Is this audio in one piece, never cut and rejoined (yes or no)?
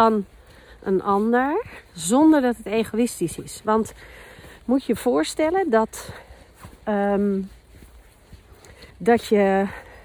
no